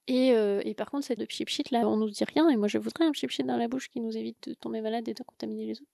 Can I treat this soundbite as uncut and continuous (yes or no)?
no